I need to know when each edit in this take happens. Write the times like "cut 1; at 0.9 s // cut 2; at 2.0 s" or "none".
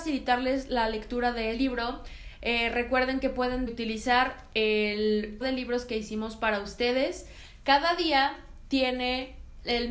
cut 1; at 1.5 s // cut 2; at 3.7 s // cut 3; at 5.4 s